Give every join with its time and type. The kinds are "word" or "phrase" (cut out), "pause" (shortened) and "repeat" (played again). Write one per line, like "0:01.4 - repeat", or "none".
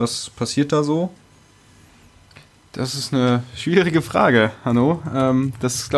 none